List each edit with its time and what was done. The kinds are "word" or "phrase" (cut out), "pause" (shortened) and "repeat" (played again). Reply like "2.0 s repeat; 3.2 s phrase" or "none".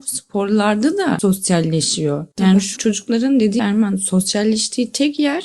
2.3 s pause; 2.8 s word; 3.6 s word

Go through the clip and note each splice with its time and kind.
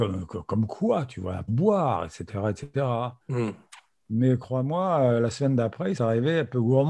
1.5 s word; 3.2 s pause; 6.0 s word

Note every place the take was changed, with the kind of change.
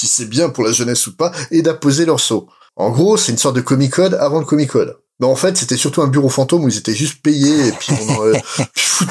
none

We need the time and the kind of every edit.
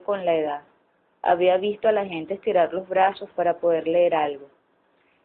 none

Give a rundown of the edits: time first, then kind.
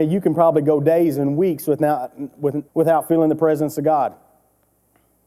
2.7 s pause

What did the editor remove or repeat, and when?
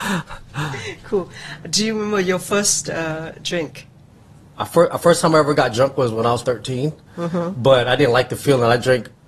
6.4 s word

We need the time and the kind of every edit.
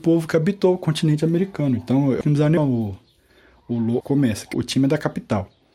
2.2 s word; 2.6 s word; 4.0 s word; 4.5 s word

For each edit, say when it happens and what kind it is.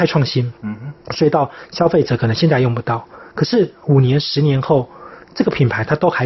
none

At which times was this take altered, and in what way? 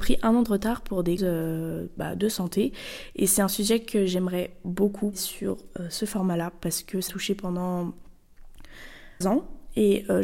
1.2 s word; 5.1 s word; 7.1 s word; 9.2 s word

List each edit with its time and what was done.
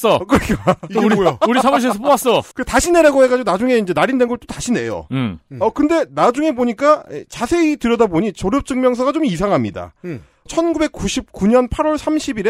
2.5 s pause

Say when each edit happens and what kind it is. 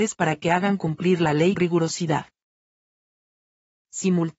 1.6 s word

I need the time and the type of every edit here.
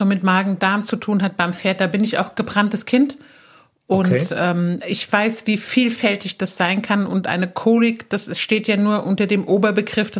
none

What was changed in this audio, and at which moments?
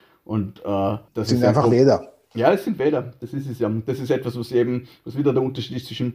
1.1 s pause

